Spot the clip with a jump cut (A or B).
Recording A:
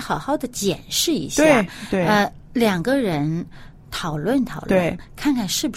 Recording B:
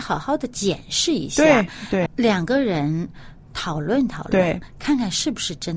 B